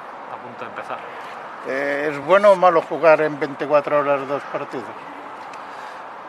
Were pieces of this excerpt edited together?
no; 0 cuts

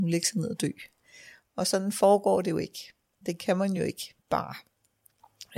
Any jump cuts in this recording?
no; 0 cuts

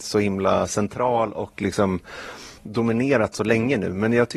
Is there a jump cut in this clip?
yes; 1 cut; at 2.6 s

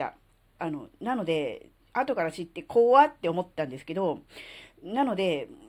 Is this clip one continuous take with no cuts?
no; 1 cut; at 1.8 s

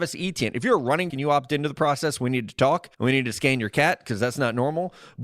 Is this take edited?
yes; 2 cuts; at 1.1 s, 2.9 s

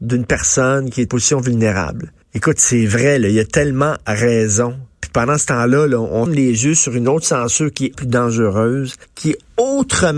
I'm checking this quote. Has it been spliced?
yes; 5 cuts; at 1.1 s, 2.2 s, 6.3 s, 7.9 s, 9.0 s

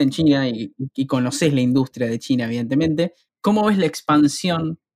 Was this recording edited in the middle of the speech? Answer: yes; 1 cut; at 3.3 s

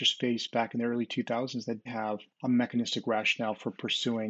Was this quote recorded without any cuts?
no; 2 cuts; at 1.9 s, 2.3 s

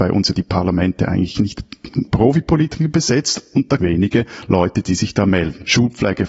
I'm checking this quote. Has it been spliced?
yes; 2 cuts; at 2.1 s, 3.8 s

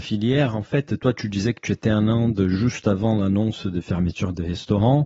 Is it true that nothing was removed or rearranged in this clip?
yes; 0 cuts

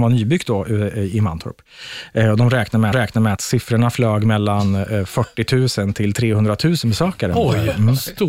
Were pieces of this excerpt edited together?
yes; 2 cuts; at 2.9 s, 3.4 s

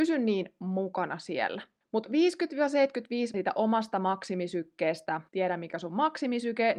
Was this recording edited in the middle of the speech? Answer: yes; 3 cuts; at 1.8 s, 3.3 s, 5.3 s

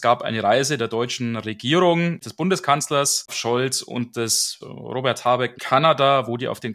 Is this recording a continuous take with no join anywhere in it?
no; 4 cuts; at 2.2 s, 3.3 s, 4.6 s, 5.6 s

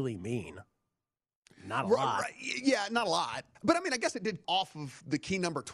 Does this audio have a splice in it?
yes; 2 cuts; at 3.5 s, 4.4 s

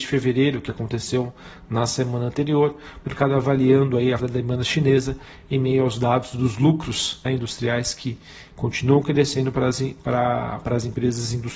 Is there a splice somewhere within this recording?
yes; 2 cuts; at 4.2 s, 7.3 s

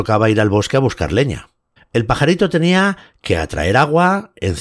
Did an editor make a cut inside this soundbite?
yes; 1 cut; at 1.8 s

